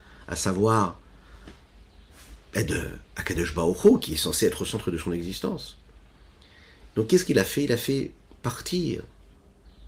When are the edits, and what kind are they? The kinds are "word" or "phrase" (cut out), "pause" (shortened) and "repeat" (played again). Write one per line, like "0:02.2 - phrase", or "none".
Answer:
none